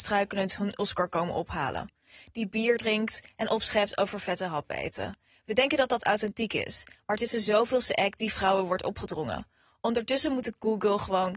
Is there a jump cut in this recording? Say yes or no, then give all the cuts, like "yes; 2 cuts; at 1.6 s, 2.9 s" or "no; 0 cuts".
no; 0 cuts